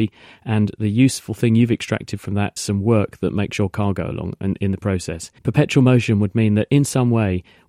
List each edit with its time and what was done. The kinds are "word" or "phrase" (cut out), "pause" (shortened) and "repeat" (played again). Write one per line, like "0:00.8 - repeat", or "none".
0:02.6 - word
0:05.4 - pause